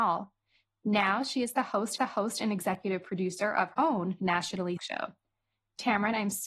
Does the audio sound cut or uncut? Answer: cut